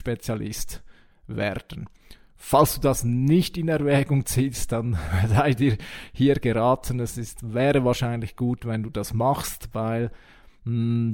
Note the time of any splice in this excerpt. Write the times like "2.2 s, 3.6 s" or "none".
none